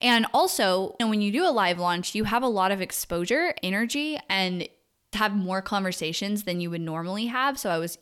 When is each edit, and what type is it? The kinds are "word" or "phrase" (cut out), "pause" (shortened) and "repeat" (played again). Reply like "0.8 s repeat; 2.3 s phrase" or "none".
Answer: 1.0 s word; 3.6 s word; 5.1 s word

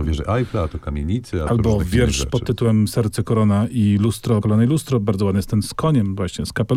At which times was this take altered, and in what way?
4.4 s phrase

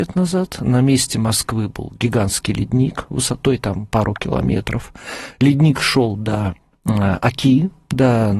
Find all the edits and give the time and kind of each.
none

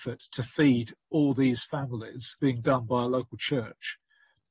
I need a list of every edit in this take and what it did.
2.4 s word

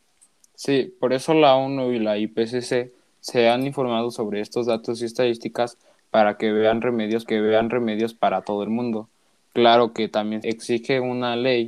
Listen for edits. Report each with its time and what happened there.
7.3 s repeat; 10.4 s word

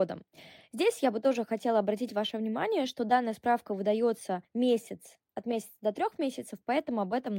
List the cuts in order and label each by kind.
4.4 s pause

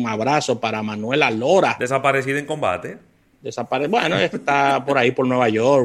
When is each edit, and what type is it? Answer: none

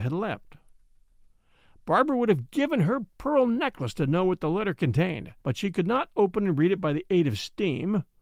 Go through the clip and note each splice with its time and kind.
5.4 s pause

